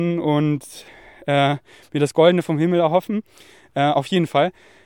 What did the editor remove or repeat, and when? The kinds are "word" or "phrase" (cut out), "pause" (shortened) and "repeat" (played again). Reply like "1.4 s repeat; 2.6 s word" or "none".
none